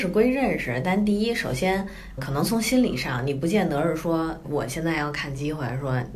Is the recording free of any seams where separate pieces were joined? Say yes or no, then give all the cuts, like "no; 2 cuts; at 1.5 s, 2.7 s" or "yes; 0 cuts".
no; 2 cuts; at 2.2 s, 4.4 s